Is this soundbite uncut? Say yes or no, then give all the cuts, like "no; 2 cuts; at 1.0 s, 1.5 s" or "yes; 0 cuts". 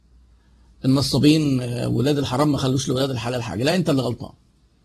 yes; 0 cuts